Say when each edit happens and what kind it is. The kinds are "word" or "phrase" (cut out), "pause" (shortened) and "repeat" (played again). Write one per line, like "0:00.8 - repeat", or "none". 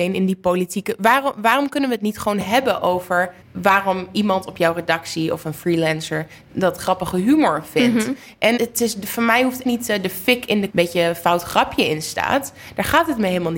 0:03.4 - pause
0:06.5 - word
0:08.6 - word
0:09.6 - word
0:10.7 - phrase